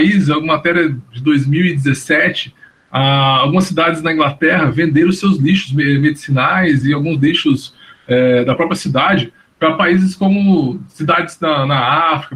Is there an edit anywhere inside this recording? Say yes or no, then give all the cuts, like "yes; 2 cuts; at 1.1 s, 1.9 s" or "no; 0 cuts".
no; 0 cuts